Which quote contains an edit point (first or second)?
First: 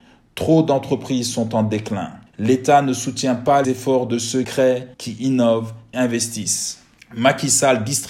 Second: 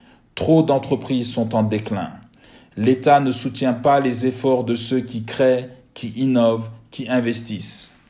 first